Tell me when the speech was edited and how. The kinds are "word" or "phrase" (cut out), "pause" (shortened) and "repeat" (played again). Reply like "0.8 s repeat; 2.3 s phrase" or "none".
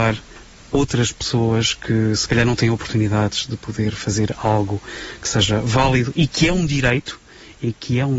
none